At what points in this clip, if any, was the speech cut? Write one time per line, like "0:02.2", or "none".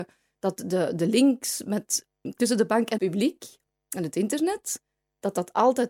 0:03.0